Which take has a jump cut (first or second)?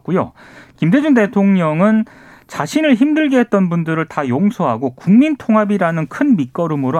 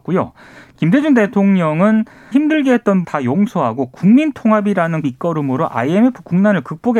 second